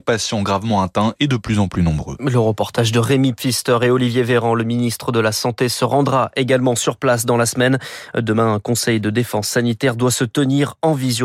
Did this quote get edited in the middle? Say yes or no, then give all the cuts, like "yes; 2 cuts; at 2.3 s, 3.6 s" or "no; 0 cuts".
no; 0 cuts